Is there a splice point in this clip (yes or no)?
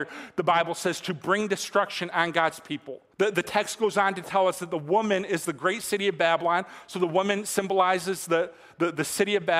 yes